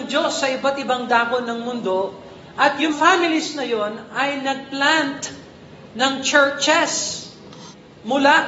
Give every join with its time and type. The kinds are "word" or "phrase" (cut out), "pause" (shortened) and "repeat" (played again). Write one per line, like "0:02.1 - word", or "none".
0:02.9 - word